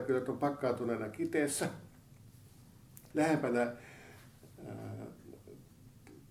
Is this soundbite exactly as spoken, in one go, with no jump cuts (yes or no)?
no